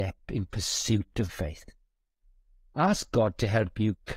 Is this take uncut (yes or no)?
no